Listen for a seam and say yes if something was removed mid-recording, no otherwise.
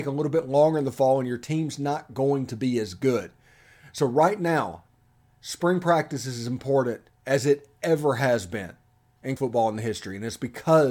yes